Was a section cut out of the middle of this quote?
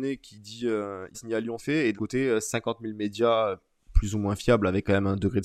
yes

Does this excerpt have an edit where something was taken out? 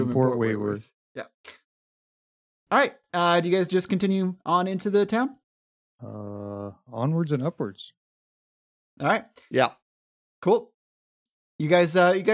no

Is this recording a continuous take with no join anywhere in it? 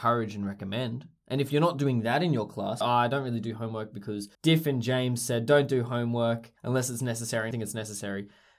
no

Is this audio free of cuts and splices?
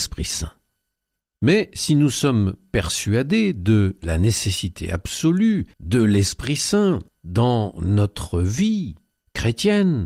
no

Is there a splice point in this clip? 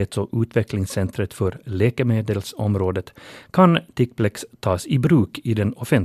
no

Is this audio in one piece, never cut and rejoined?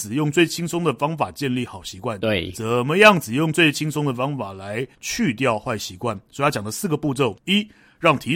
no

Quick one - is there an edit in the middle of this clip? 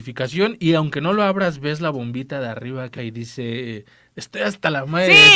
yes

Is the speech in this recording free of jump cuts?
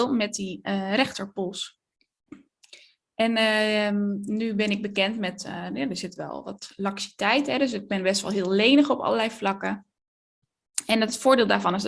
yes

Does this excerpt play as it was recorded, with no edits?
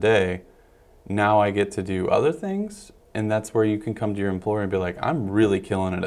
yes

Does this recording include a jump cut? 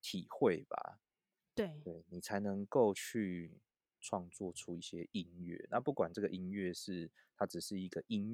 no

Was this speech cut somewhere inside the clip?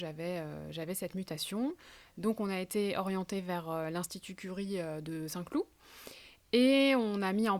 no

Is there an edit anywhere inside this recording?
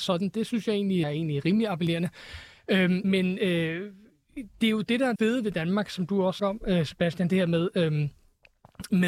yes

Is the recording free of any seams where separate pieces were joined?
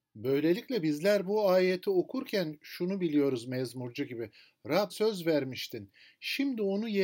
no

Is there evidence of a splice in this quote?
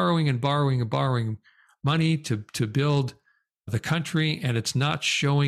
no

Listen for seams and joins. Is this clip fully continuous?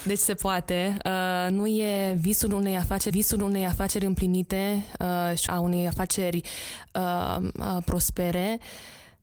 no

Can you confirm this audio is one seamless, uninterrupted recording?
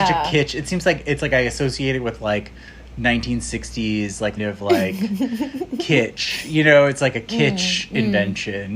no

